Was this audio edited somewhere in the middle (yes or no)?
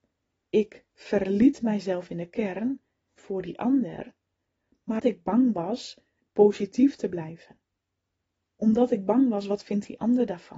yes